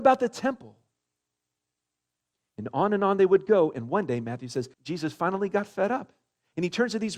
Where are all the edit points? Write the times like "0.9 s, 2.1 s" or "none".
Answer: 4.7 s